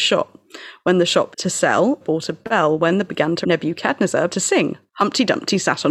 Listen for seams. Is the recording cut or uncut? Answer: cut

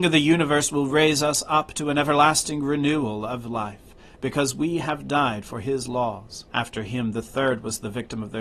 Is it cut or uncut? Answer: cut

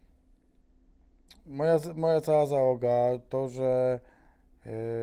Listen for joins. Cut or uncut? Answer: uncut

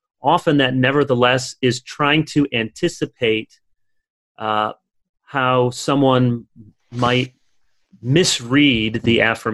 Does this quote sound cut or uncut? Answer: uncut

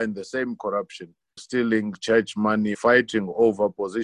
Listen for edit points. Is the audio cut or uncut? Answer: cut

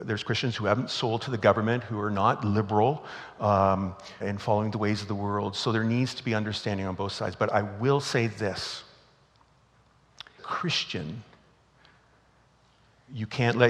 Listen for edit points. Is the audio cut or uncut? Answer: cut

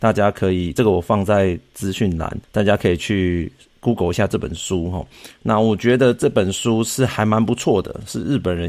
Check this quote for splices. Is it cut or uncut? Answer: cut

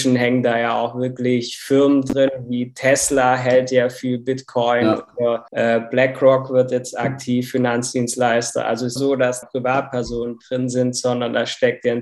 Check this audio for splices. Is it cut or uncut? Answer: cut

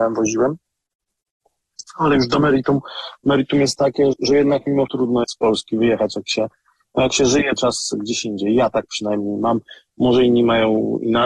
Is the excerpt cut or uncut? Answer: cut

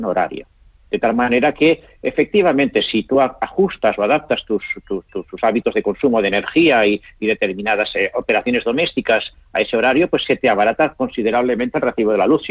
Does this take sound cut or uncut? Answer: uncut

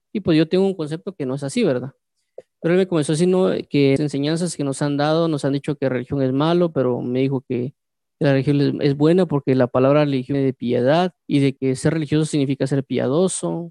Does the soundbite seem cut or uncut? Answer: cut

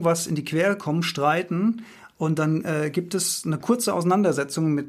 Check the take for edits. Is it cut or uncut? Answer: uncut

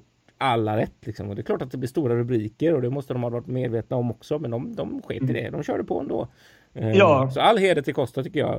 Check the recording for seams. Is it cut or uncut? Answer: uncut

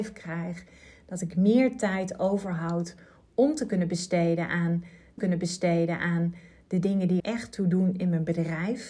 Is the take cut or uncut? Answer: cut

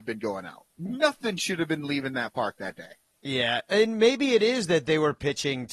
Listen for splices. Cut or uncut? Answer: uncut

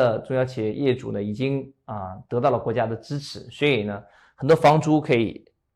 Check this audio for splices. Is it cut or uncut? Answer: uncut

